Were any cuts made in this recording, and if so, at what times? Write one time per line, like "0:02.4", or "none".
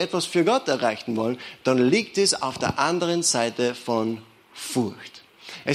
none